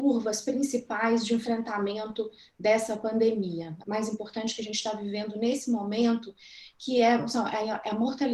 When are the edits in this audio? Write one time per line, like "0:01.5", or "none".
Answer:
0:03.8